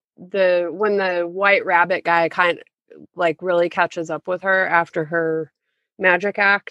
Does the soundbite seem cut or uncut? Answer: uncut